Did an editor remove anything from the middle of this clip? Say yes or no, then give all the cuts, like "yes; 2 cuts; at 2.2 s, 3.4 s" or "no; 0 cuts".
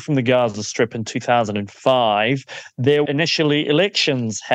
yes; 1 cut; at 3.1 s